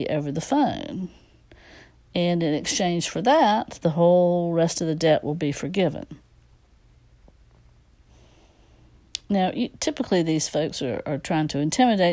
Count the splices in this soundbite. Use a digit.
0